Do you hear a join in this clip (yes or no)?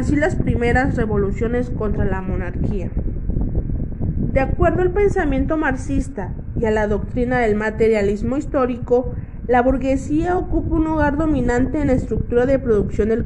no